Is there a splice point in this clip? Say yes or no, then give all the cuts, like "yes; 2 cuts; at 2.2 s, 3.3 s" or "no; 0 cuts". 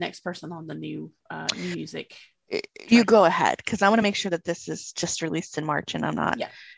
no; 0 cuts